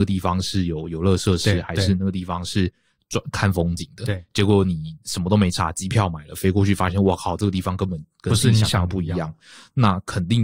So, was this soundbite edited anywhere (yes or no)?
no